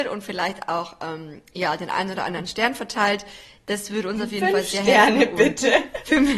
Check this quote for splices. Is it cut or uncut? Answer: uncut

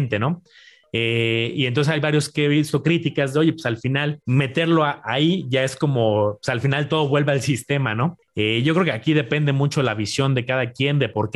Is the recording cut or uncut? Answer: cut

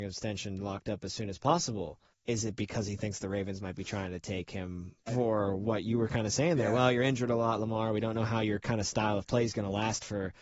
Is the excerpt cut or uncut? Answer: cut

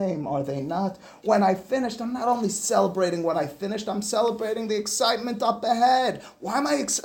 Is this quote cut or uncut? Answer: uncut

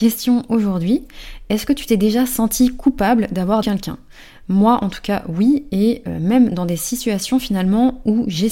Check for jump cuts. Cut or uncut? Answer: cut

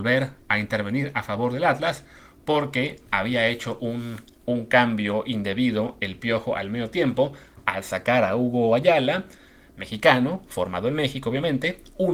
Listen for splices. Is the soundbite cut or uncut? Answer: uncut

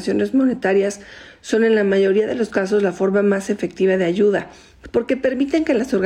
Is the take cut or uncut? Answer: uncut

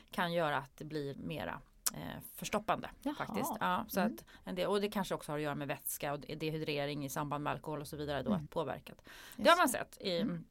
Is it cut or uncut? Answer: cut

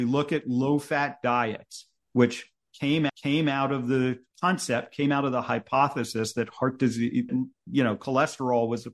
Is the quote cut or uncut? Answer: cut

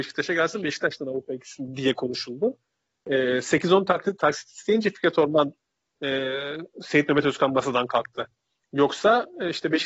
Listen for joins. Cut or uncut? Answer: uncut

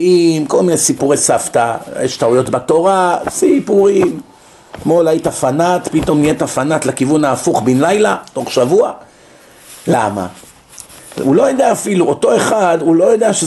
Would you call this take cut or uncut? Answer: uncut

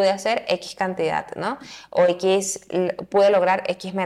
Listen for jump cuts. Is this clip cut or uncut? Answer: uncut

